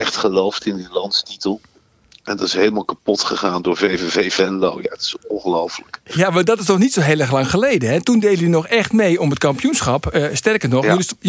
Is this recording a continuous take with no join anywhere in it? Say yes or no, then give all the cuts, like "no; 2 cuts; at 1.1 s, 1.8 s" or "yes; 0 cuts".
yes; 0 cuts